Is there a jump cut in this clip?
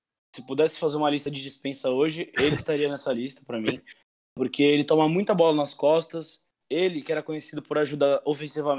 no; 0 cuts

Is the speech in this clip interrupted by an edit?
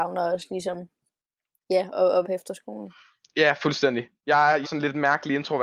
yes; 4 cuts; at 1.6 s, 1.9 s, 2.2 s, 4.6 s

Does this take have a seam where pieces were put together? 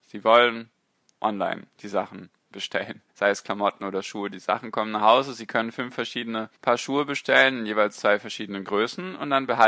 yes; 3 cuts; at 1.7 s, 3.1 s, 6.5 s

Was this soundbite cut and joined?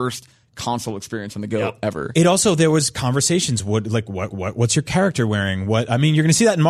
yes; 1 cut; at 4.3 s

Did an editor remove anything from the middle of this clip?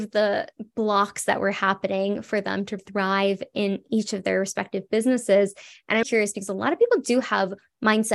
yes; 2 cuts; at 2.8 s, 6.0 s

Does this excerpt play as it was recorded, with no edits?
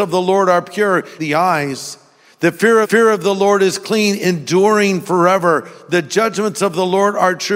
no; 2 cuts; at 1.2 s, 2.8 s

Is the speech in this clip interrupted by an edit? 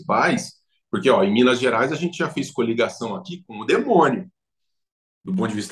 no; 0 cuts

